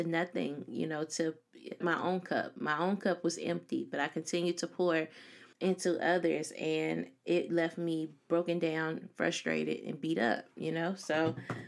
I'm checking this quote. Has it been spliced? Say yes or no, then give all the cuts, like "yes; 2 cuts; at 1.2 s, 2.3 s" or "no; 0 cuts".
yes; 2 cuts; at 1.8 s, 5.5 s